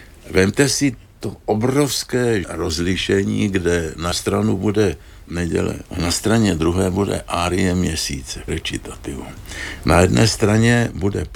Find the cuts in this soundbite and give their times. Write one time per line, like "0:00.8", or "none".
0:02.4
0:04.1
0:05.3
0:05.8
0:08.5